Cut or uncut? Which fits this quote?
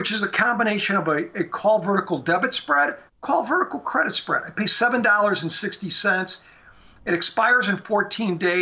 uncut